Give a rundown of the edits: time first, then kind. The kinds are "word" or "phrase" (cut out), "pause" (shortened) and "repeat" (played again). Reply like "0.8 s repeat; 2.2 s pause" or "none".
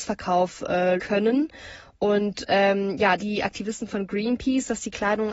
1.0 s word; 3.2 s phrase